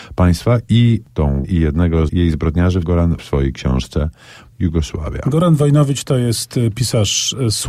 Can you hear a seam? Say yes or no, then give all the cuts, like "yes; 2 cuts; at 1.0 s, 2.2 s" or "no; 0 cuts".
yes; 6 cuts; at 1.1 s, 1.4 s, 2.1 s, 2.8 s, 3.2 s, 4.5 s